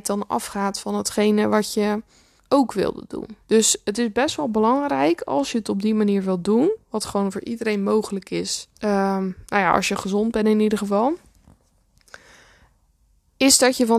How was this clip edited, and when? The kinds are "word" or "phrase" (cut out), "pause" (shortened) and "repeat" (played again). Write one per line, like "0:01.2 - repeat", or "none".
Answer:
0:02.4 - pause
0:03.4 - pause
0:08.8 - pause